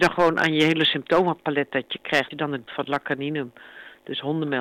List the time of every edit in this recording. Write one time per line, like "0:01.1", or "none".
0:02.3
0:02.7